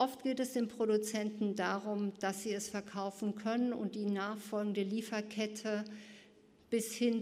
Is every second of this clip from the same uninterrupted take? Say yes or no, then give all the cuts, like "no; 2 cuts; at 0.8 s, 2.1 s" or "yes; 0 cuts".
yes; 0 cuts